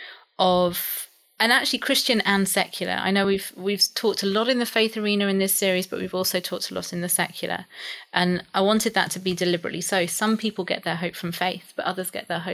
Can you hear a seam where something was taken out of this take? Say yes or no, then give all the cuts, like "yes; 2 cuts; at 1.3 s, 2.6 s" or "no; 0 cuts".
no; 0 cuts